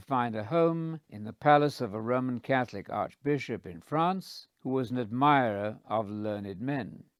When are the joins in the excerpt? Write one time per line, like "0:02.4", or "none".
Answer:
0:01.0
0:04.5